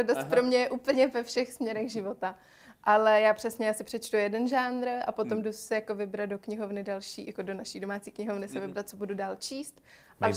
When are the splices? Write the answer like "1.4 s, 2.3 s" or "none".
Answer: none